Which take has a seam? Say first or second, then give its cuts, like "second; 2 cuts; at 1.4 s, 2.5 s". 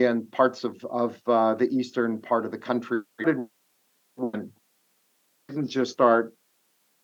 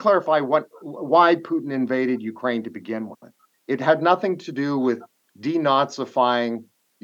first; 1 cut; at 3.1 s